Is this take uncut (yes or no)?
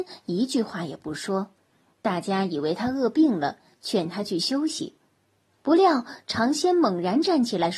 yes